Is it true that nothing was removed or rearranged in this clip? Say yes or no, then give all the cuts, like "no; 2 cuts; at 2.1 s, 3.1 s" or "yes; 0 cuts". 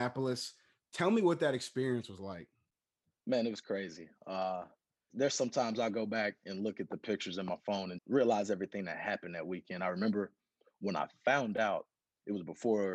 no; 2 cuts; at 5.1 s, 8.0 s